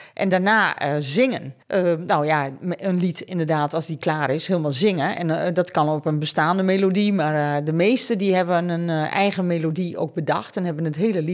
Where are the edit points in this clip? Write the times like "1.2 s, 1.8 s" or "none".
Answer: 1.6 s